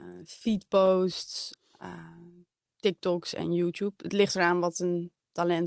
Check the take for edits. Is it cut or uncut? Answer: uncut